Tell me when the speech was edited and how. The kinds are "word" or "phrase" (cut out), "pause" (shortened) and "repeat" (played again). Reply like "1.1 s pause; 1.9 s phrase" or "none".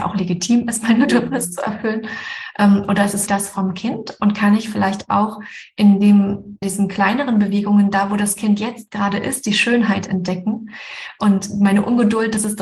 3.3 s word; 6.6 s word